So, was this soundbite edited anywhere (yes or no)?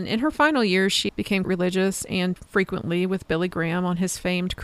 yes